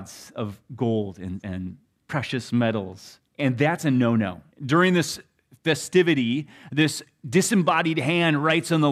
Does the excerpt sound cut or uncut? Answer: cut